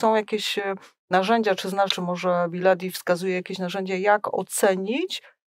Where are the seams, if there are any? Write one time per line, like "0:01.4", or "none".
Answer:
0:01.9